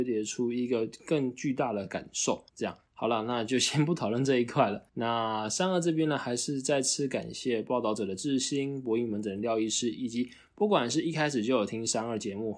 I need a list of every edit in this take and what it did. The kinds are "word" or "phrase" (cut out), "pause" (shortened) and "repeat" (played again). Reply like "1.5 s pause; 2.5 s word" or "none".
2.5 s pause; 2.9 s pause; 4.9 s pause